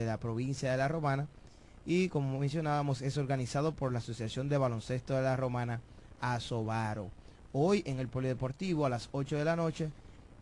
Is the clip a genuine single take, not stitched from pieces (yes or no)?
yes